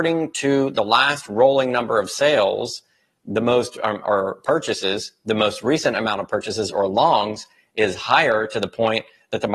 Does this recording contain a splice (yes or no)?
no